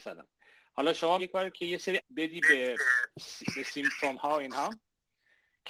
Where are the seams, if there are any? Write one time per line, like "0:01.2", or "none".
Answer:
0:01.2
0:01.5
0:02.0